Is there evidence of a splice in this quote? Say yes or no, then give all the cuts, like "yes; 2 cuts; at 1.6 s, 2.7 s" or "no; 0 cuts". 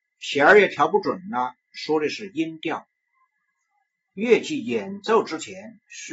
no; 0 cuts